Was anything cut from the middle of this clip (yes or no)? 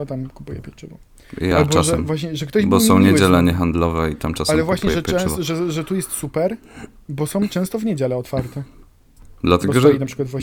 no